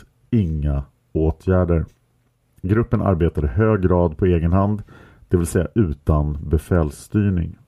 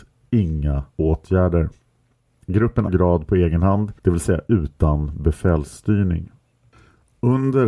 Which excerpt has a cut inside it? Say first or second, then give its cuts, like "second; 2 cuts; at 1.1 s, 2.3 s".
second; 3 cuts; at 0.9 s, 2.9 s, 4.0 s